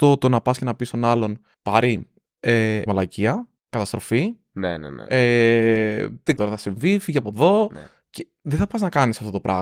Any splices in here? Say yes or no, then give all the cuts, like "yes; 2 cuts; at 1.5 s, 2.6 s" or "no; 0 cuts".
yes; 4 cuts; at 1.5 s, 2.9 s, 3.6 s, 6.4 s